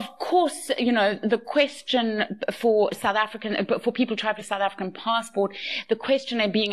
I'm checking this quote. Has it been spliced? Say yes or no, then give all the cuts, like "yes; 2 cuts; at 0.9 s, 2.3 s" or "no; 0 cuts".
yes; 1 cut; at 4.4 s